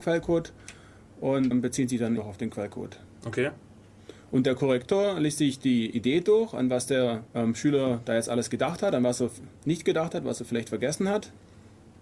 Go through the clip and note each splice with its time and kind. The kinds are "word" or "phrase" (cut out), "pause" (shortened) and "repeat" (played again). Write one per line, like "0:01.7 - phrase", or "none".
0:01.5 - word
0:02.2 - word
0:03.1 - pause
0:07.3 - pause
0:09.6 - pause